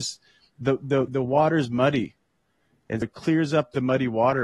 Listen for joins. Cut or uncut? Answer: cut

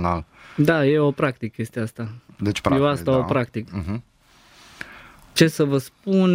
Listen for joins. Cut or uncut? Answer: uncut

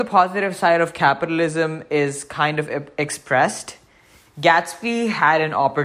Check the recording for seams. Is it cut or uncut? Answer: uncut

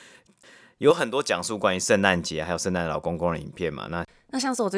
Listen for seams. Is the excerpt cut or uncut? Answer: uncut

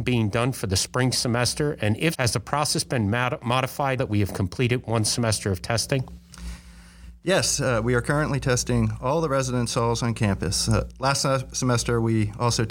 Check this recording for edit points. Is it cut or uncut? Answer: cut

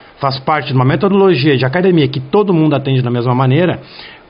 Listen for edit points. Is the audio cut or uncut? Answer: uncut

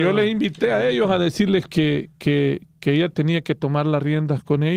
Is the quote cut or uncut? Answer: uncut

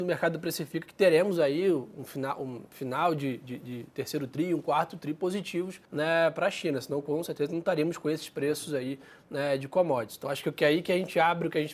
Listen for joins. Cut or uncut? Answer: cut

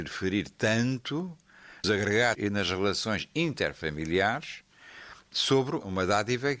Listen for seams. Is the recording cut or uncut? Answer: cut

